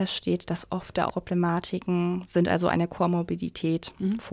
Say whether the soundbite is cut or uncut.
cut